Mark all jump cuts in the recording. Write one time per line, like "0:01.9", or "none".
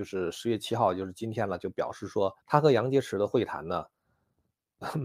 0:02.4